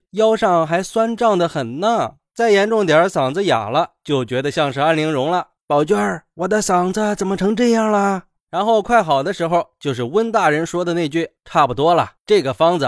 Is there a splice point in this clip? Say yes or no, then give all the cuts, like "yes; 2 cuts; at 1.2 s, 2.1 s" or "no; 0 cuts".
no; 0 cuts